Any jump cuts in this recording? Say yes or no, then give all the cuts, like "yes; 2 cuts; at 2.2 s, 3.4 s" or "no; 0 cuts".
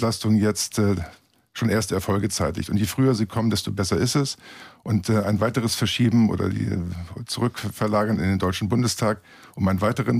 no; 0 cuts